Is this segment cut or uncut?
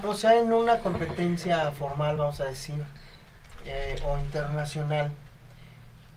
uncut